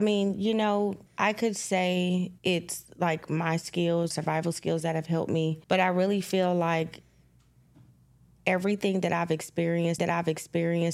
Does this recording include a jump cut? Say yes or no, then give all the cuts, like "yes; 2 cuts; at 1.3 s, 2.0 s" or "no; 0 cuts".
yes; 5 cuts; at 1.1 s, 2.4 s, 4.1 s, 5.6 s, 10.0 s